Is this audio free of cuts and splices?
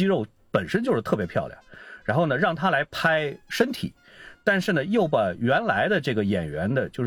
yes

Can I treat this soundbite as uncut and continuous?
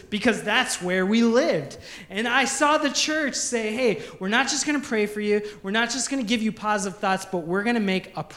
yes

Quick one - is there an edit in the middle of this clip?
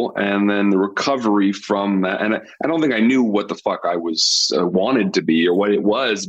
no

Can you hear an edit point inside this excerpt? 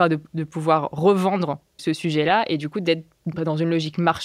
yes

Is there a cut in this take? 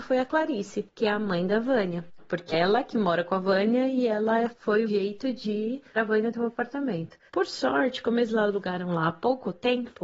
yes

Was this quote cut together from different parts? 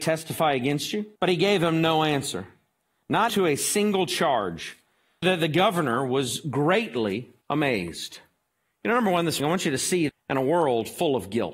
yes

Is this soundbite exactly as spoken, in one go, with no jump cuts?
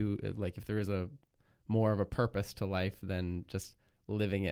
yes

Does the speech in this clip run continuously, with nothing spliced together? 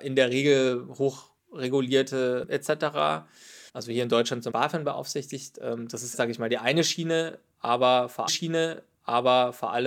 no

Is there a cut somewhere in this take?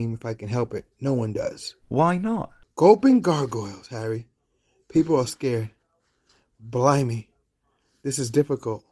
yes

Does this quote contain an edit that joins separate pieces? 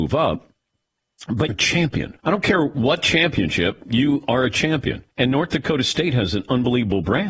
yes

